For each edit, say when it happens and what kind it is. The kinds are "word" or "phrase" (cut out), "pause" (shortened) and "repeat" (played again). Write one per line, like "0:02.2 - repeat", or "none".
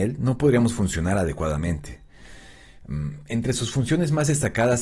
none